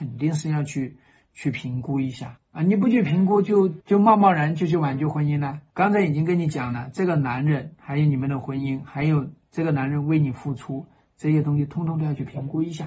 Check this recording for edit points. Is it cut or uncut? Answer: uncut